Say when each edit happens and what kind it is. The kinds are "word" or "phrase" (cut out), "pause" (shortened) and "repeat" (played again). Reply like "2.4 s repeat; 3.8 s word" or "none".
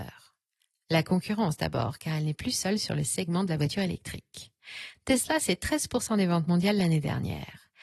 none